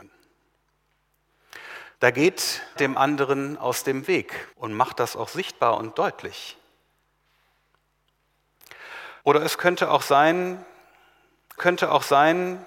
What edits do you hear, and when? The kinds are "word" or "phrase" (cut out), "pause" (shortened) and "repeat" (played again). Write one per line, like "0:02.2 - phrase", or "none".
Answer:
0:02.0 - pause
0:02.8 - word
0:04.5 - pause
0:09.2 - pause
0:11.6 - repeat